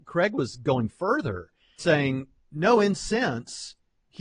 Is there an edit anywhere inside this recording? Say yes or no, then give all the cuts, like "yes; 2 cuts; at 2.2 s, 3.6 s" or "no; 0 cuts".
yes; 2 cuts; at 1.8 s, 3.0 s